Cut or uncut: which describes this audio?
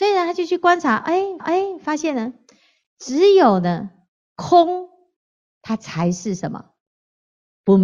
cut